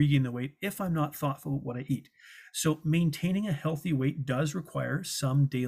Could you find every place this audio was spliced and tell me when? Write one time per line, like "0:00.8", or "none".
none